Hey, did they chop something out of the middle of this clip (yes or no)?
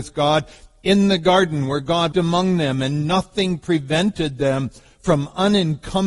yes